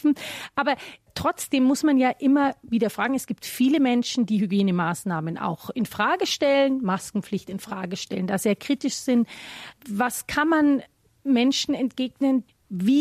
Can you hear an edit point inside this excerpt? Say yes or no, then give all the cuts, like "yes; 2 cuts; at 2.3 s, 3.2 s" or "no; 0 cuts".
no; 0 cuts